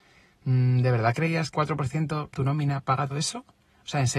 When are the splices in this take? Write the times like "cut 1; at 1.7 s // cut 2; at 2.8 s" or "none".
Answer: cut 1; at 1.5 s // cut 2; at 2.3 s // cut 3; at 3.1 s